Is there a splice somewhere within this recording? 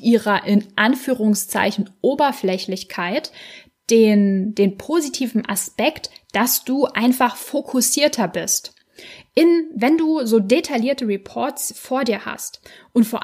no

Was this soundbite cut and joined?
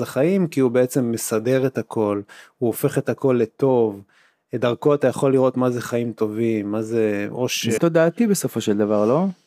yes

